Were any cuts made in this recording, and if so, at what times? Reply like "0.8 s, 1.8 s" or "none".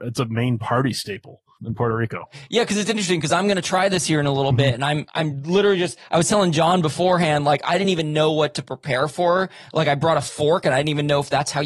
none